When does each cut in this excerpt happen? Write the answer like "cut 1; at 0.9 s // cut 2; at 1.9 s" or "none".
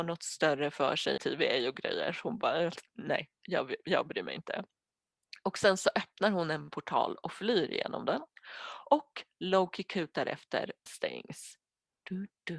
cut 1; at 1.2 s // cut 2; at 3.4 s // cut 3; at 10.9 s